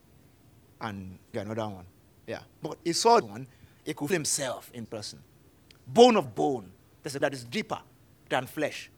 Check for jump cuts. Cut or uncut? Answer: cut